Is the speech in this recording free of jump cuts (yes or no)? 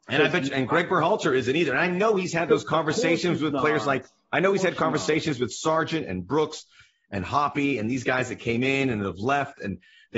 yes